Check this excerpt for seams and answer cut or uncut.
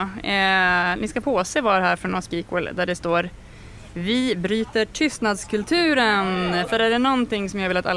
cut